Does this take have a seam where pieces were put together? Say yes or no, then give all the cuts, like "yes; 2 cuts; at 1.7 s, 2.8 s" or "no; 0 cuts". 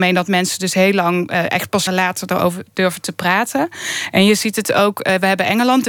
yes; 1 cut; at 1.9 s